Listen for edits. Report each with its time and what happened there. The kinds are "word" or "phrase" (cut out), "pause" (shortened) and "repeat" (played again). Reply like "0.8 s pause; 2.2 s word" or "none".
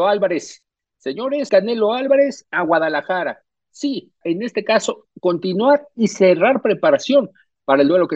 1.5 s word; 2.4 s word; 4.2 s word